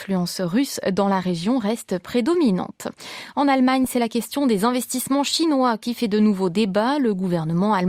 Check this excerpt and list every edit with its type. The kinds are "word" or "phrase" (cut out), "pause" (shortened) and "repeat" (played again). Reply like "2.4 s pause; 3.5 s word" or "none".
none